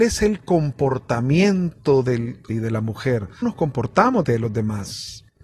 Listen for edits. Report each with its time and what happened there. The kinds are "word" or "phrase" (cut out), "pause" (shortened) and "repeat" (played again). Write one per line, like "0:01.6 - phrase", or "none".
0:02.5 - word
0:03.4 - word
0:04.2 - word